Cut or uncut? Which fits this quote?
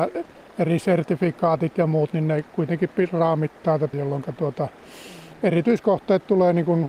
cut